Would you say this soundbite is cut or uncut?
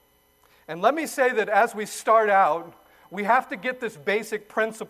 uncut